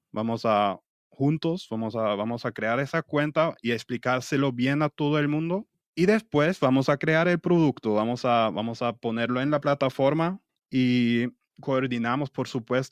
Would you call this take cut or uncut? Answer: cut